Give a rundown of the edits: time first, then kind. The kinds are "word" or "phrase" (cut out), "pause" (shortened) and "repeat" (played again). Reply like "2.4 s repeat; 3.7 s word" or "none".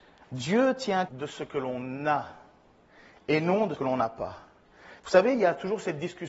1.1 s word; 3.7 s word; 5.0 s pause